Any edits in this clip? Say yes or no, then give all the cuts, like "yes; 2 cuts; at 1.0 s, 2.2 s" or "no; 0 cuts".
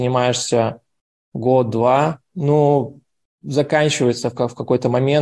no; 0 cuts